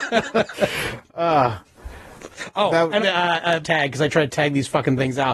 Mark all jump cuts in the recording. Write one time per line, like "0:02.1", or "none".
0:03.0
0:03.6